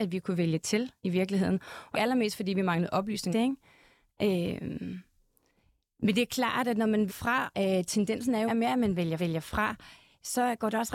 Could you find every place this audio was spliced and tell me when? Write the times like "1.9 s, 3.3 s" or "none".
1.0 s, 1.9 s, 3.3 s, 7.1 s, 7.5 s, 8.5 s, 9.2 s

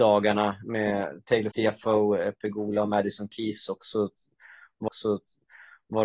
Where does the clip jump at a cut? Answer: 1.5 s, 4.9 s

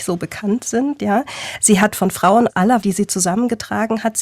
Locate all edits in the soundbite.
1.9 s, 2.5 s, 2.8 s

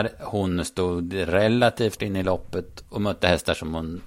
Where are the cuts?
2.0 s

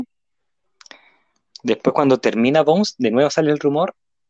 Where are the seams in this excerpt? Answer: none

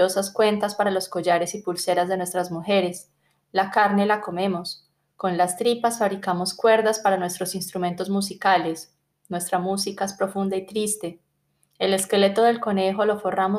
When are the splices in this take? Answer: none

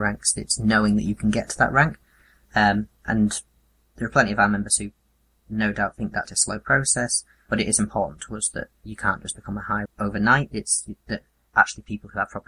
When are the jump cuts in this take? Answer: 6.2 s, 7.5 s, 9.9 s

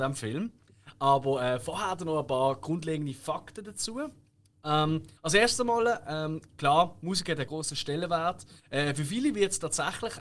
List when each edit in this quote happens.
5.2 s, 7.5 s, 8.6 s

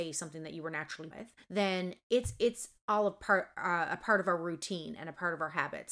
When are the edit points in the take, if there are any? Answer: 1.1 s, 1.4 s

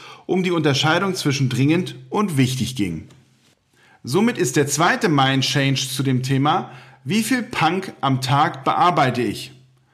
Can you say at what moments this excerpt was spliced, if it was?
none

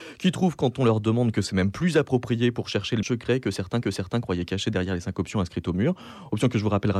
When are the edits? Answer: 3.0 s, 3.8 s

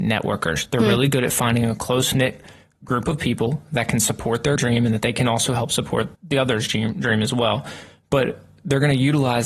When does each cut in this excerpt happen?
4.6 s, 6.1 s

